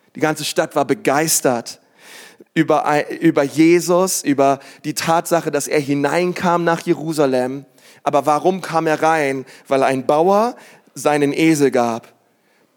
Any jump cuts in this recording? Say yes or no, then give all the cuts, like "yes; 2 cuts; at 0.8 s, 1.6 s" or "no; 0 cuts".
no; 0 cuts